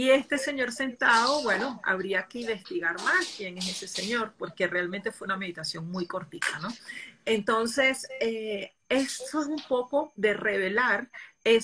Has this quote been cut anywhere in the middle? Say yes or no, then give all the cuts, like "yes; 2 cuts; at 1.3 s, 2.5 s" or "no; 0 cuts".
no; 0 cuts